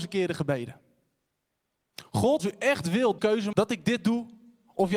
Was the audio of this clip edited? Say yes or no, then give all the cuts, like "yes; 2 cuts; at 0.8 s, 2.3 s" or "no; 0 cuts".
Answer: yes; 3 cuts; at 2.4 s, 3.2 s, 3.5 s